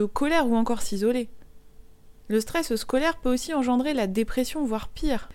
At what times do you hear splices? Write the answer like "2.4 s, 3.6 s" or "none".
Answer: none